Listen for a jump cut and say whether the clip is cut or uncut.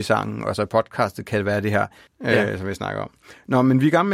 cut